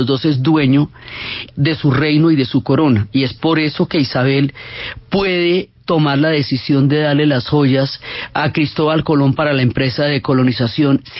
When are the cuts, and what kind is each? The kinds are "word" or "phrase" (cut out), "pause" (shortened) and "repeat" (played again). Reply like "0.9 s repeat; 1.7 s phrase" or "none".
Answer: 1.5 s word